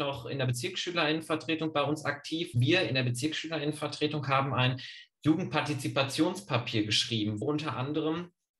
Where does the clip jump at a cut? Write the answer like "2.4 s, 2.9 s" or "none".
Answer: 2.5 s, 7.4 s

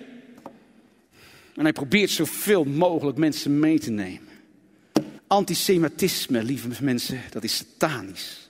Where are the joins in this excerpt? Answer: 5.2 s

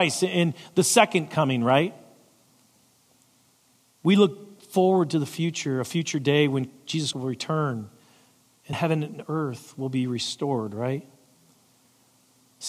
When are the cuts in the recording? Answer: 7.1 s, 8.7 s

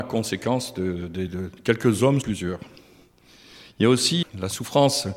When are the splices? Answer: 1.3 s, 2.2 s, 4.2 s

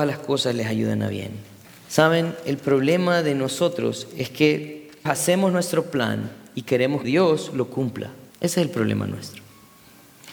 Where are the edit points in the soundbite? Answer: 1.6 s, 5.1 s, 7.0 s, 8.3 s

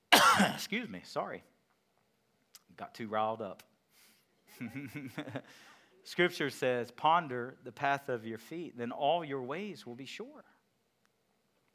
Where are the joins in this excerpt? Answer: 2.6 s

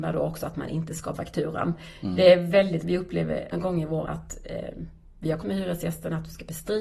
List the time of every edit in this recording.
1.1 s, 2.8 s, 3.5 s, 4.0 s, 5.4 s

